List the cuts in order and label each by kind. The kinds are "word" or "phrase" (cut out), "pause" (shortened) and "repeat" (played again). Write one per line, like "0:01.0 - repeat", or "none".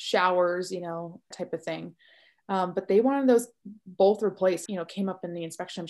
0:01.3 - word
0:04.7 - phrase